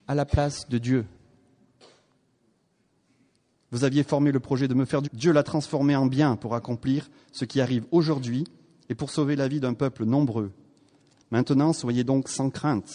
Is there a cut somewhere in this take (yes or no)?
yes